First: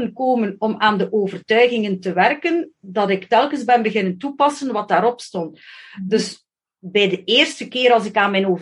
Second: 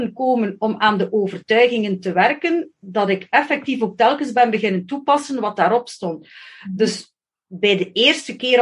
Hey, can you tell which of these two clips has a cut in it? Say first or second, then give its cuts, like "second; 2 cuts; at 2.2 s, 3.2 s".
first; 1 cut; at 3.3 s